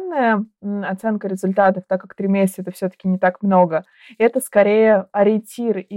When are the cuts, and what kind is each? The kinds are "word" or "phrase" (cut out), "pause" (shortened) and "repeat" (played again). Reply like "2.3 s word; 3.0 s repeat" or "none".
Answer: none